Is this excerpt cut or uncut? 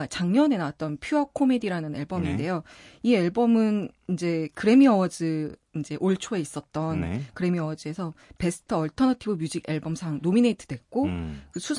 uncut